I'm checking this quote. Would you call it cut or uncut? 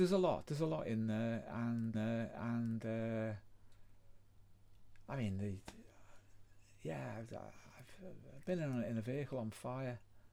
cut